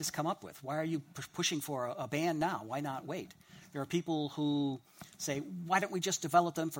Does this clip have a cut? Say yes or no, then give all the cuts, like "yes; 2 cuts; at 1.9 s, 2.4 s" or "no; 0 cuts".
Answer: no; 0 cuts